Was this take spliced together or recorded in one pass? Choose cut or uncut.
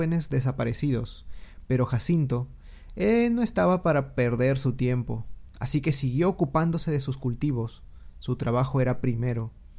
uncut